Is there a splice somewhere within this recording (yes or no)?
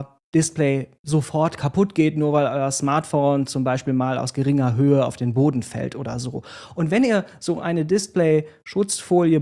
yes